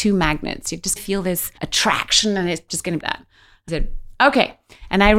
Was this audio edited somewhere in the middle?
yes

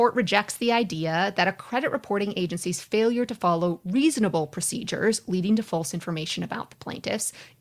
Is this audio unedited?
yes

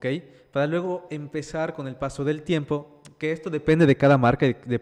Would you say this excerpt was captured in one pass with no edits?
yes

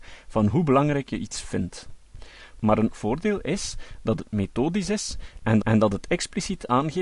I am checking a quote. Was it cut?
yes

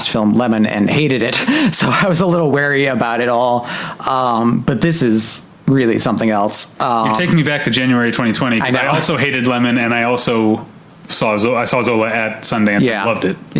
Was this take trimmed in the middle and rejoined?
no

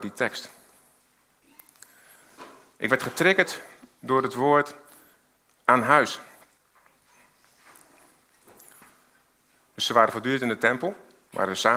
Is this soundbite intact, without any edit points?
yes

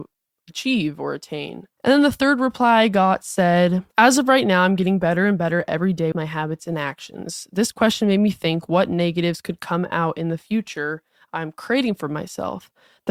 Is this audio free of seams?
no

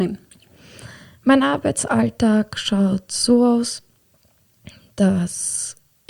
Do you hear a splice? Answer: no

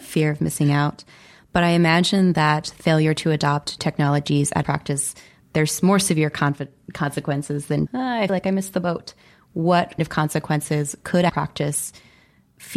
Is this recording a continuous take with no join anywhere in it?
no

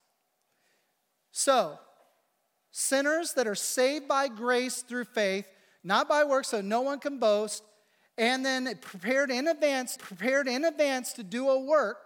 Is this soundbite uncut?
no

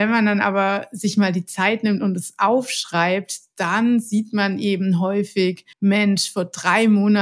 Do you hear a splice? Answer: yes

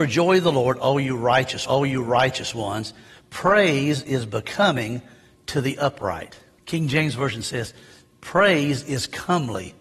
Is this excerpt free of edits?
no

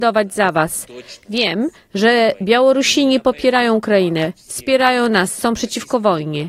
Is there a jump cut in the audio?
no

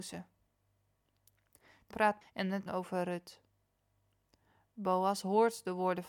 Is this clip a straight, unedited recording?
no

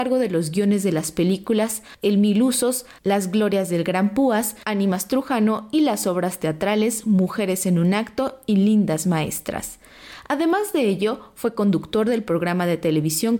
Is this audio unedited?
yes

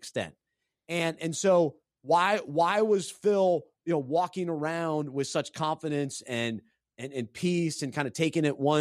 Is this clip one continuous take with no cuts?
yes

